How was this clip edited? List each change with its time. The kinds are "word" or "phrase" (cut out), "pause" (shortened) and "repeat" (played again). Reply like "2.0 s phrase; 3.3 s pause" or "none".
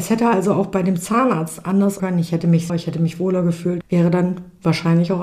2.0 s word; 2.7 s word; 3.8 s word